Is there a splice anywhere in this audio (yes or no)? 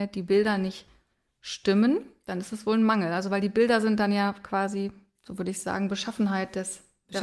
no